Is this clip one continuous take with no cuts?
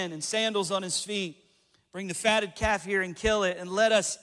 yes; 0 cuts

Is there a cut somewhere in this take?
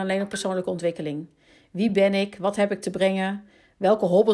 no; 0 cuts

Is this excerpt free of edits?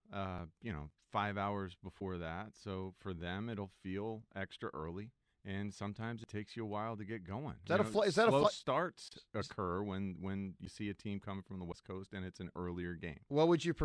no; 1 cut; at 5.3 s

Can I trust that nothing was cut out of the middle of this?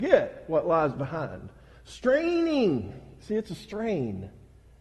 yes; 0 cuts

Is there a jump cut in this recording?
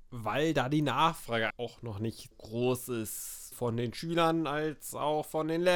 yes; 3 cuts; at 1.5 s, 2.3 s, 3.5 s

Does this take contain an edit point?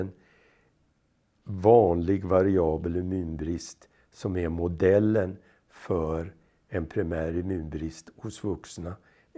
no; 0 cuts

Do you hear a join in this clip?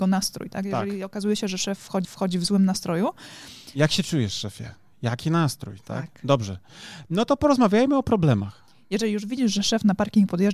yes; 1 cut; at 2.0 s

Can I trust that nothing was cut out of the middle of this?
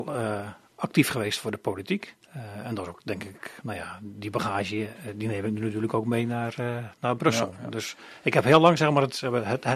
no; 1 cut; at 2.2 s

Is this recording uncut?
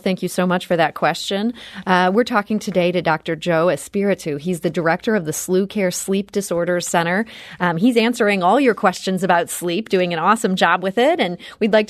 yes; 0 cuts

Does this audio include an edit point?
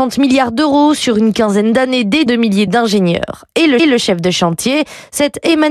yes; 3 cuts; at 2.3 s, 2.7 s, 3.8 s

